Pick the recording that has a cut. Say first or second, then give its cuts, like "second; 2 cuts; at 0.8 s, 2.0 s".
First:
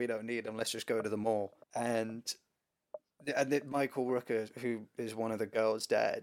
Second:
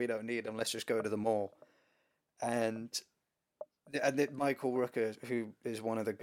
first; 1 cut; at 1.6 s